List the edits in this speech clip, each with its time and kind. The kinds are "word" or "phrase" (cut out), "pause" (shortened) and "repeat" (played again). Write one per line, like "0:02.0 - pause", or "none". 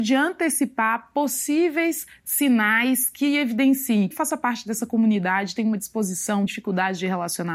0:04.1 - phrase
0:06.5 - word